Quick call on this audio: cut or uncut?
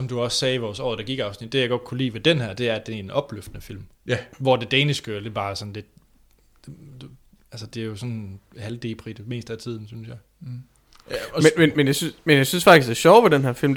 cut